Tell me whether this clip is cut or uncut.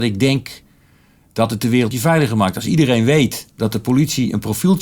cut